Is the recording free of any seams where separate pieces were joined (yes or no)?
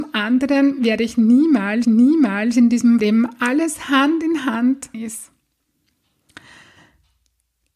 no